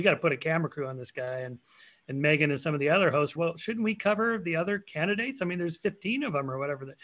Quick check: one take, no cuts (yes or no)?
no